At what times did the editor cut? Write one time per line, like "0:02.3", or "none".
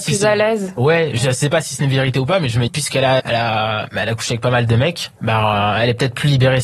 0:02.7
0:03.2